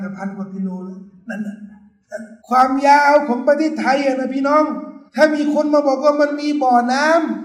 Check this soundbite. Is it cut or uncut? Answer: cut